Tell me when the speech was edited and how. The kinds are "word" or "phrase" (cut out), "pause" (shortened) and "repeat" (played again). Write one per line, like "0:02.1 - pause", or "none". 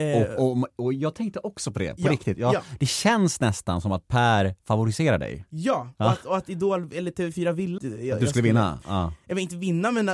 0:07.8 - word